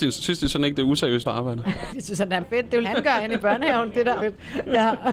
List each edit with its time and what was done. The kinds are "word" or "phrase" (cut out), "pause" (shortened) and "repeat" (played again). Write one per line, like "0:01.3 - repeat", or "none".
0:01.2 - phrase
0:01.9 - word
0:02.4 - word
0:02.8 - word
0:04.2 - word